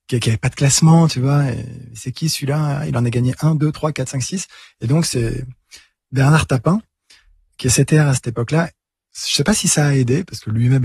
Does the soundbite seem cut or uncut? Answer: uncut